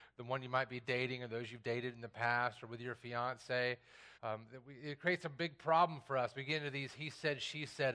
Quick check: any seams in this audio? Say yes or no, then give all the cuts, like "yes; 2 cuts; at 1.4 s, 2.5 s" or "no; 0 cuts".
yes; 1 cut; at 4.1 s